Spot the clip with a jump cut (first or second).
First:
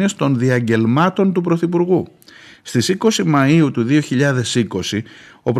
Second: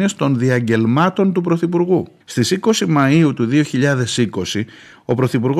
second